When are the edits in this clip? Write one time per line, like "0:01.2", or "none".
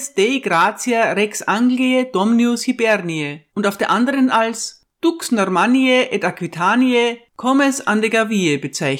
0:03.5